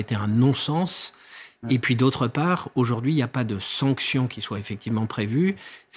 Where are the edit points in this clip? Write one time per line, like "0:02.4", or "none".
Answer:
none